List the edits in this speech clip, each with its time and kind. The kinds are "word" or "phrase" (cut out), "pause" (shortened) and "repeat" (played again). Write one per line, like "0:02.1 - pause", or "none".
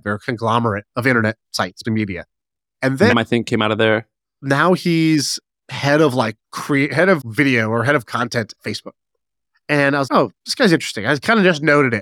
0:01.8 - word
0:03.1 - word
0:04.2 - pause
0:05.5 - pause
0:06.4 - pause
0:07.2 - word
0:08.1 - word
0:08.5 - word
0:10.1 - word